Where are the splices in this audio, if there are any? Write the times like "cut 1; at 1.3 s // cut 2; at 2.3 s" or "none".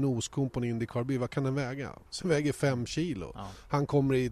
cut 1; at 2.2 s